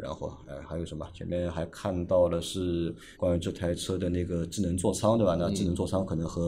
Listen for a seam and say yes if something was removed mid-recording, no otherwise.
yes